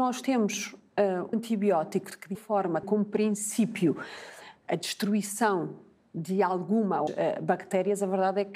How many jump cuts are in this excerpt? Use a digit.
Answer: 4